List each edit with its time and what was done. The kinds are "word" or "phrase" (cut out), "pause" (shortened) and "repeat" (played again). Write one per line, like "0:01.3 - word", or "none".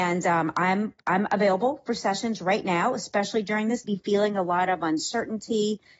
0:03.8 - phrase